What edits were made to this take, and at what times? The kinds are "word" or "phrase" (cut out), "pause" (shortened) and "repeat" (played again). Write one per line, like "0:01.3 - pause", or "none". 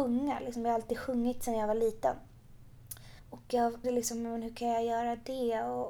0:03.2 - pause
0:03.8 - word